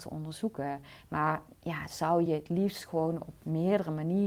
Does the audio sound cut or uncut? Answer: uncut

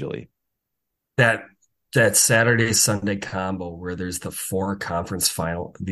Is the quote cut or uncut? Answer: uncut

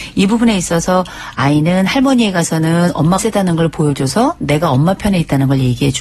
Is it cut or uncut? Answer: cut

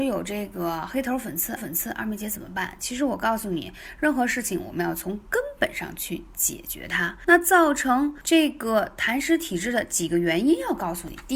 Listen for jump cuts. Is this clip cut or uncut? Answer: cut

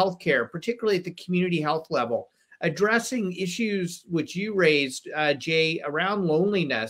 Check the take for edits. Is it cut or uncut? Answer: uncut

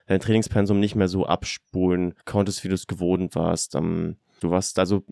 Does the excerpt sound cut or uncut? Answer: cut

